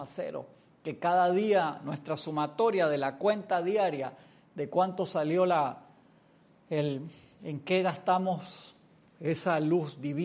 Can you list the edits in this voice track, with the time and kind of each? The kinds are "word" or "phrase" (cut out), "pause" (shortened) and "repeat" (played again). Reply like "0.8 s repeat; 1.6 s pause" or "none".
none